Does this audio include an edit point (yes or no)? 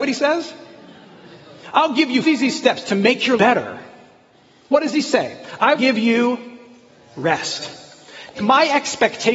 yes